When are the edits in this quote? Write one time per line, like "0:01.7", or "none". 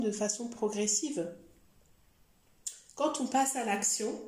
none

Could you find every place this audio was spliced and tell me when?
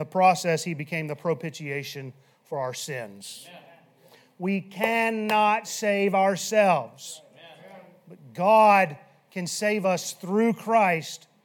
none

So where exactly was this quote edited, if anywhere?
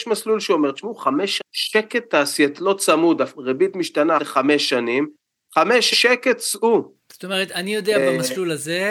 0:01.4
0:02.6
0:03.3
0:04.2
0:05.9

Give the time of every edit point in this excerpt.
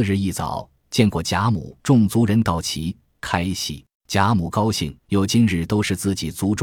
0:01.8
0:03.9
0:05.0

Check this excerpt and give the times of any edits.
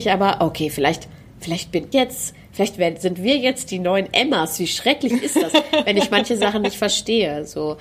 0:01.9

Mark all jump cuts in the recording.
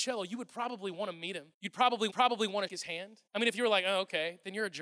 0:01.5
0:02.1
0:02.7
0:03.3

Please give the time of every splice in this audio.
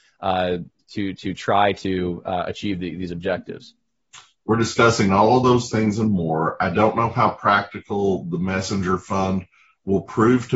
none

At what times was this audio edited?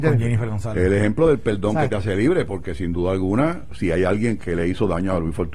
none

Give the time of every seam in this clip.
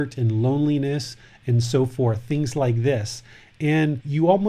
none

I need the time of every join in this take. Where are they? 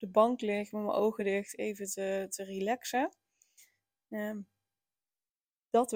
none

